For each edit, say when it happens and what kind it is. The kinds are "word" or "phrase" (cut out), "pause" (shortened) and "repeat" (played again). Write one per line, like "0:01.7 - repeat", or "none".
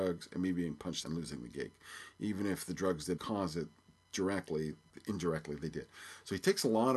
0:01.0 - phrase
0:03.2 - word
0:03.9 - pause